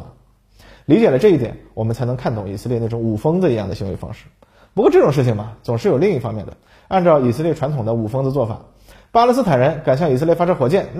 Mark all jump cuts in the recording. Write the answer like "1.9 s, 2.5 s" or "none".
none